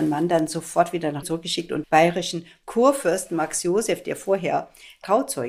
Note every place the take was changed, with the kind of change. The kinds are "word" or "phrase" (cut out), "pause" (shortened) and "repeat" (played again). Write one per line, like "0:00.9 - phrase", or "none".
0:01.2 - word
0:01.8 - word